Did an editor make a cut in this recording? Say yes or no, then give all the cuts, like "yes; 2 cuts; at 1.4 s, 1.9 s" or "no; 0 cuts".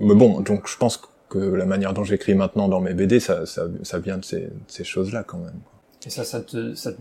no; 0 cuts